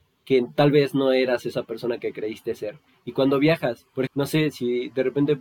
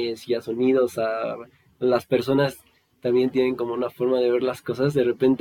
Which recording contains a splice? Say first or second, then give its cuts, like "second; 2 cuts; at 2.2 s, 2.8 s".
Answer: first; 1 cut; at 4.1 s